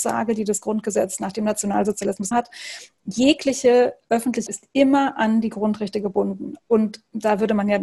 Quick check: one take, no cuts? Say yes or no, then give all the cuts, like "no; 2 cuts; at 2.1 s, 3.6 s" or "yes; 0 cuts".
no; 2 cuts; at 2.3 s, 4.5 s